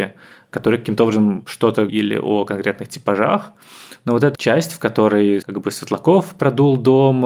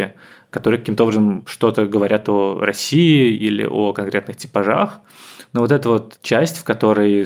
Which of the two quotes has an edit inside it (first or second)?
first